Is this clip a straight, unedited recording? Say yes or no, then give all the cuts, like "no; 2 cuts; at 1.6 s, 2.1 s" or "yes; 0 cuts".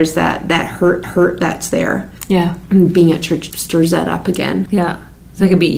no; 3 cuts; at 1.0 s, 3.5 s, 4.7 s